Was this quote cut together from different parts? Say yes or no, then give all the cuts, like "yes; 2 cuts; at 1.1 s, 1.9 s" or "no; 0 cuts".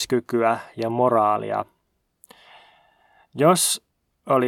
no; 0 cuts